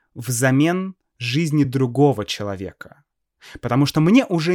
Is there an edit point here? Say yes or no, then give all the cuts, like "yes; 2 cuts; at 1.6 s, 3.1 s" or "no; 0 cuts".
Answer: no; 0 cuts